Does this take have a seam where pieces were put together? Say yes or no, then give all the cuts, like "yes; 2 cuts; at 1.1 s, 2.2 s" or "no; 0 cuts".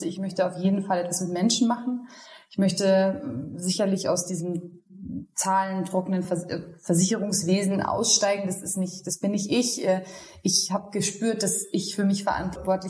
no; 0 cuts